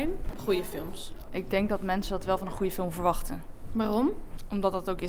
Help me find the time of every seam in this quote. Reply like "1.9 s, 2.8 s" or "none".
none

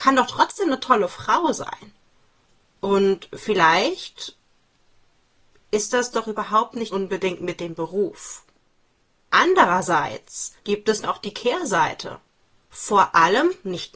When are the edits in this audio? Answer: 6.9 s, 10.6 s, 11.0 s

